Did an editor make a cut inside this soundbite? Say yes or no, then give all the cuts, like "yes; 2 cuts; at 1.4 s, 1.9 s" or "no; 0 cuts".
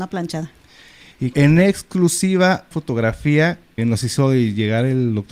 yes; 3 cuts; at 1.3 s, 2.7 s, 3.8 s